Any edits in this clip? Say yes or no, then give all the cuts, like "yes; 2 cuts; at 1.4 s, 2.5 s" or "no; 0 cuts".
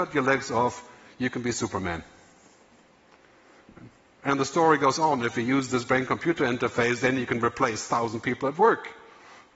no; 0 cuts